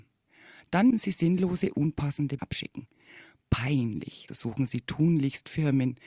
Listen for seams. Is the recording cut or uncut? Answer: cut